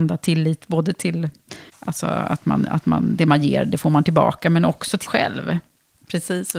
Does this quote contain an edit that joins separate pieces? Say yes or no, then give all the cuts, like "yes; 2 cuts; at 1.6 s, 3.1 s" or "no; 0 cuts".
yes; 2 cuts; at 1.7 s, 5.1 s